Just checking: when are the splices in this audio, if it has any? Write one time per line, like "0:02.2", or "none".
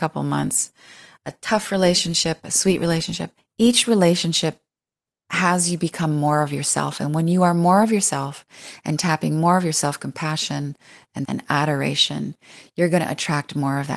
0:03.4
0:11.2